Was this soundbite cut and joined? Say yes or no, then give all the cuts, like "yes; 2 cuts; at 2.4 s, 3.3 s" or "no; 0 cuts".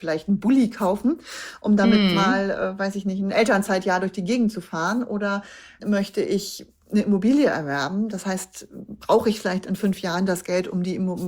yes; 1 cut; at 5.8 s